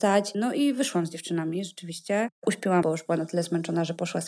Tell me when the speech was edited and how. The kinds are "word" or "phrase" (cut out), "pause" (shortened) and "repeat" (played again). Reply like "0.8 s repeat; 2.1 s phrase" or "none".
2.8 s word